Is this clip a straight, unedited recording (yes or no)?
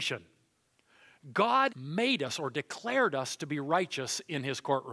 no